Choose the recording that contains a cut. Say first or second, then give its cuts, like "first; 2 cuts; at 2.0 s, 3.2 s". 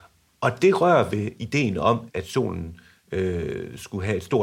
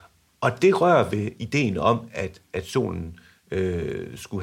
first; 1 cut; at 2.1 s